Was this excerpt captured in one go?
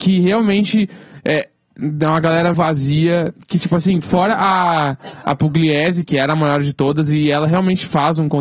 no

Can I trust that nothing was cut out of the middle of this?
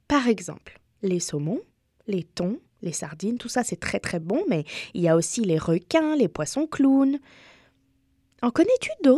yes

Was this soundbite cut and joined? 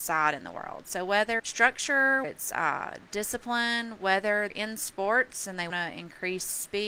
yes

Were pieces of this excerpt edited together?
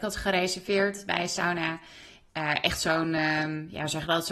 no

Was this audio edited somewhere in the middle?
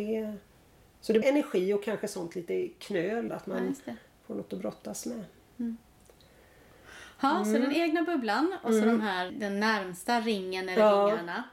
yes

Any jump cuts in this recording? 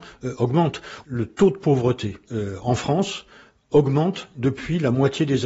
no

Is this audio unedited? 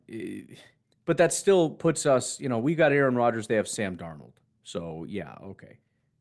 yes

